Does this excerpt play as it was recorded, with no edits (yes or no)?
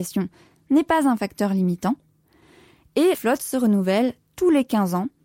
no